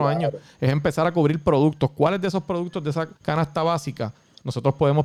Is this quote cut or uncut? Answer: cut